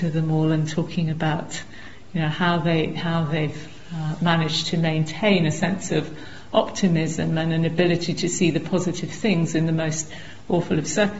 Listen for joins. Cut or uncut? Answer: uncut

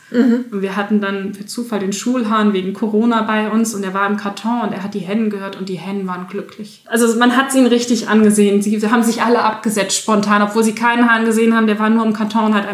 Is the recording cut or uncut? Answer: uncut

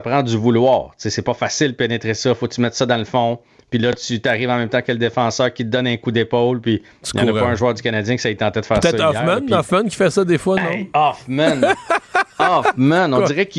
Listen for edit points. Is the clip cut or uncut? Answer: uncut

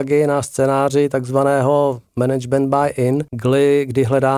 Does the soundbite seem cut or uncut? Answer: cut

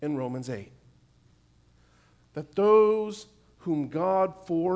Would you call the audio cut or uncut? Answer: uncut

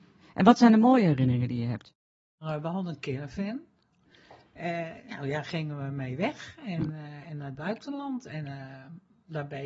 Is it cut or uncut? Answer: uncut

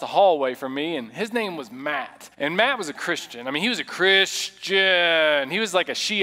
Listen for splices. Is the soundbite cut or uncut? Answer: cut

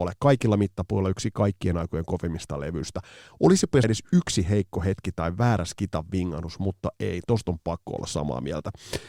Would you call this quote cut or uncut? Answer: cut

